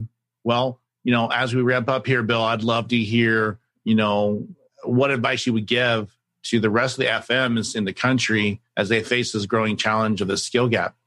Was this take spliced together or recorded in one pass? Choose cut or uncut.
uncut